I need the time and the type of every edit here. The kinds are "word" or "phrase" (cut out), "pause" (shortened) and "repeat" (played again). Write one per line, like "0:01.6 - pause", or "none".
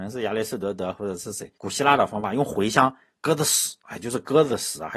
0:01.6 - pause